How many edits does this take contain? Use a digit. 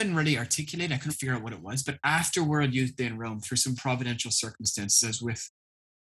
2